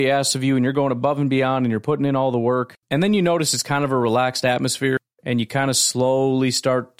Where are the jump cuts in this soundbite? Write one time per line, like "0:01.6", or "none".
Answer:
0:02.8